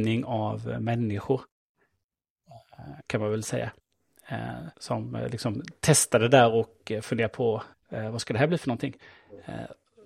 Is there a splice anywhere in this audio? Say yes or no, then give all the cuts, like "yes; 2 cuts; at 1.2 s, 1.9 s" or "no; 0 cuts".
yes; 3 cuts; at 3.0 s, 4.7 s, 7.7 s